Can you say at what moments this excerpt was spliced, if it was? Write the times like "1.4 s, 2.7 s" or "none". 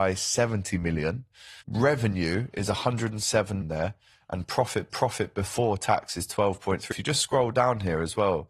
1.6 s, 3.6 s, 4.9 s, 6.9 s

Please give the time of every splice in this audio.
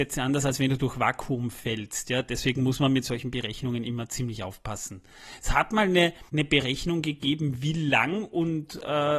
6.3 s

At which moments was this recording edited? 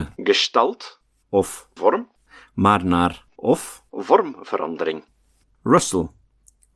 1.8 s, 3.3 s

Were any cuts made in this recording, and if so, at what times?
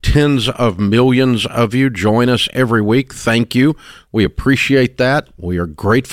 none

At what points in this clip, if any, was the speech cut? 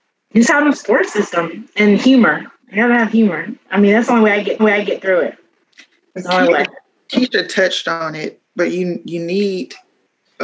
2.6 s, 4.6 s, 8.4 s

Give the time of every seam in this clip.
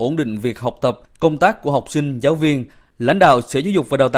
none

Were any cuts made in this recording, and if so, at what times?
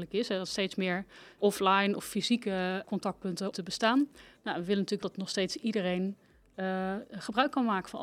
1.4 s, 2.8 s, 3.5 s, 5.0 s

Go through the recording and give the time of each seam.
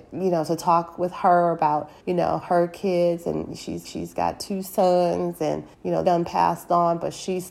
2.0 s, 3.8 s, 5.7 s, 6.0 s

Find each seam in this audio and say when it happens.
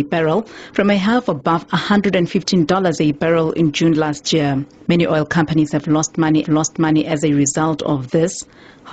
6.4 s

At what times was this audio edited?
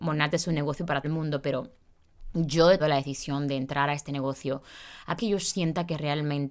1.0 s, 2.8 s, 5.2 s

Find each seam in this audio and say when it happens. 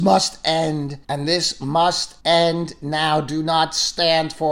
1.0 s, 2.2 s

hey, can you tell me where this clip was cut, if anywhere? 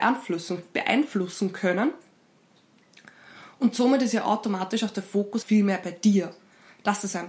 5.4 s

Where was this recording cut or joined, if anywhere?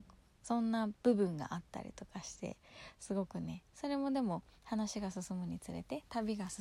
3.7 s, 4.6 s

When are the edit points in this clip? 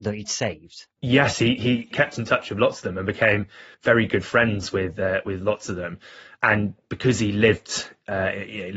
0.9 s, 3.7 s

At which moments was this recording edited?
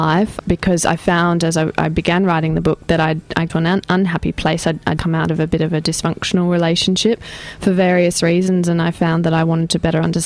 3.5 s, 5.0 s

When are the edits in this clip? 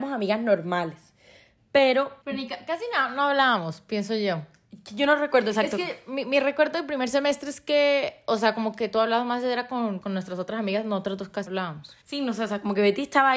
2.2 s, 10.0 s, 11.5 s, 12.0 s

